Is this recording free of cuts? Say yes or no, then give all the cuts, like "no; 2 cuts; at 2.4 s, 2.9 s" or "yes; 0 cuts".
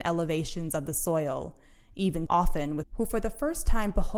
no; 2 cuts; at 2.3 s, 2.8 s